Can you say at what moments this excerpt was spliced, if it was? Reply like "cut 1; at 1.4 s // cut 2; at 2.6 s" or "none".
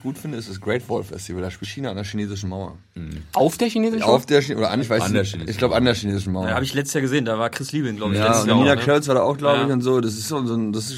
cut 1; at 1.6 s // cut 2; at 4.8 s